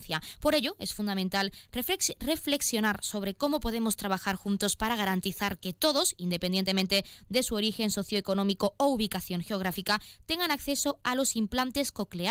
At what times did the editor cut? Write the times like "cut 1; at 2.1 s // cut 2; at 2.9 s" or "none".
none